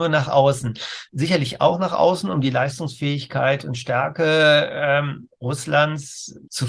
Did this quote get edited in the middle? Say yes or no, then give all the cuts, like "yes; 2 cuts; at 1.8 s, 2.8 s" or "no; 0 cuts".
no; 0 cuts